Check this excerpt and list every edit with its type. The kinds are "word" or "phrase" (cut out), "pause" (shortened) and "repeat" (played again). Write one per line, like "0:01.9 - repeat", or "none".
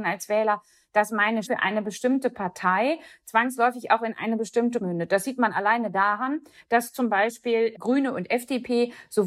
0:01.5 - word
0:04.8 - word